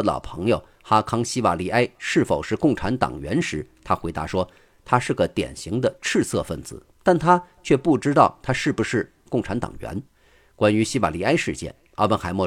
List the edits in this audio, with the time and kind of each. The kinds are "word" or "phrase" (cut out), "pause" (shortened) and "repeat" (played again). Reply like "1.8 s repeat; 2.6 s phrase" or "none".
6.9 s pause; 10.1 s pause